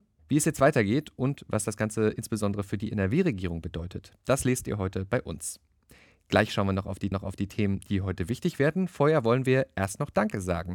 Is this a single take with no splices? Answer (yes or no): no